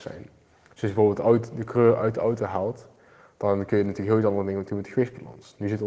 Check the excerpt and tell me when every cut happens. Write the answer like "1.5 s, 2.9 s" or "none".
none